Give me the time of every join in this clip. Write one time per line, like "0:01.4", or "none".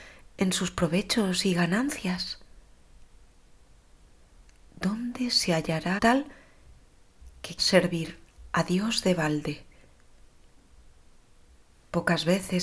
0:06.0
0:07.6